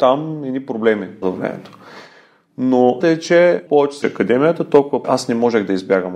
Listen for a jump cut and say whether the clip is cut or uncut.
cut